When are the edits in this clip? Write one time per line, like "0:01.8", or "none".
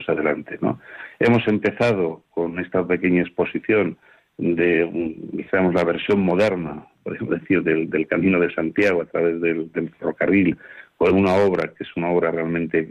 none